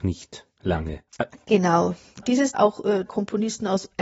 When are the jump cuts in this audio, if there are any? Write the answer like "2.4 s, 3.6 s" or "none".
1.1 s, 2.2 s, 2.5 s, 3.1 s